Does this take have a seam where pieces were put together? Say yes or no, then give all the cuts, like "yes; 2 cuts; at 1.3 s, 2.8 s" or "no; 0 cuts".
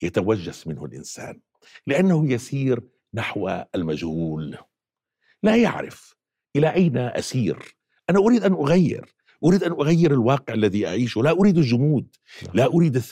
no; 0 cuts